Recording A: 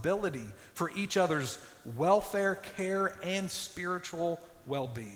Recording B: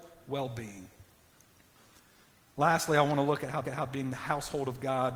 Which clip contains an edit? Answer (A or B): B